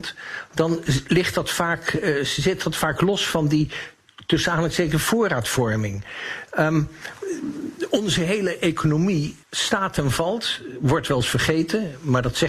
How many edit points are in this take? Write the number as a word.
one